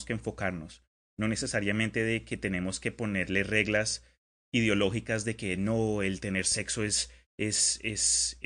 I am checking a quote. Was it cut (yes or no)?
no